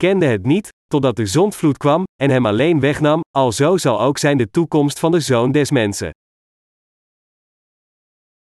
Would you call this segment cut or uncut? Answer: uncut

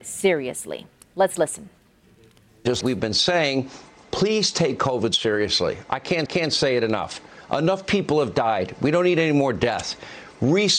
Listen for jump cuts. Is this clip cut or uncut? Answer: cut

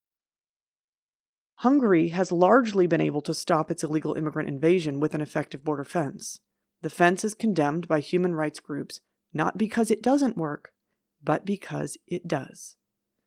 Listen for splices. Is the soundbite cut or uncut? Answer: uncut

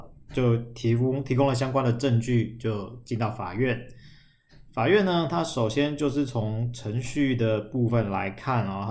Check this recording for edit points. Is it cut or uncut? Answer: uncut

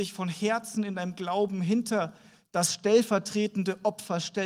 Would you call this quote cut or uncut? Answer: uncut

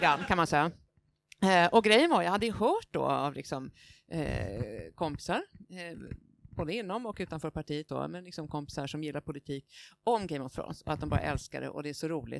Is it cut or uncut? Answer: cut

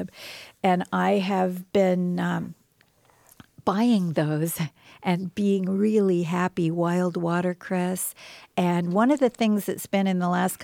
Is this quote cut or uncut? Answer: uncut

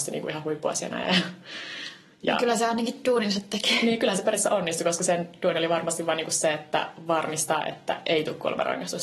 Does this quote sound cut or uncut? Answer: uncut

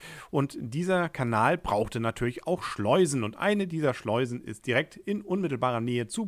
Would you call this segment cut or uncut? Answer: uncut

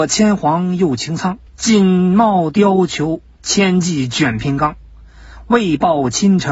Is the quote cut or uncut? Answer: cut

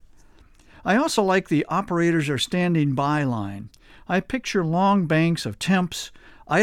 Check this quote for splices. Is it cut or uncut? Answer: uncut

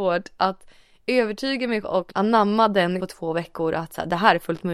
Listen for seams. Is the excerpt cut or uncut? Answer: cut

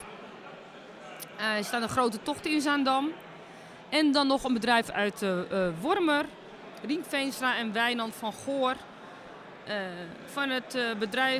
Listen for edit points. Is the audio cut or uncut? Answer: uncut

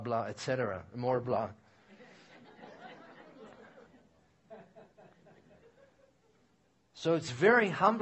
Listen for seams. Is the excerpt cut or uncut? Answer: cut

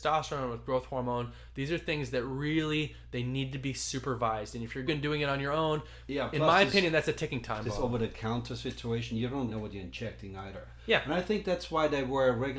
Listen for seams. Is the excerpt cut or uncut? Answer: cut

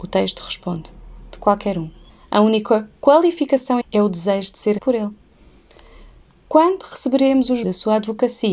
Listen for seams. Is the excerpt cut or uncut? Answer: cut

